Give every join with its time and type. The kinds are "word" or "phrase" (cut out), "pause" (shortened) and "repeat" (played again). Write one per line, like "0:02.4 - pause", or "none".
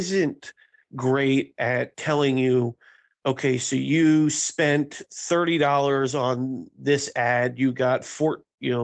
none